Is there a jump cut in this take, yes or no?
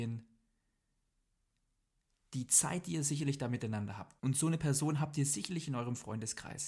yes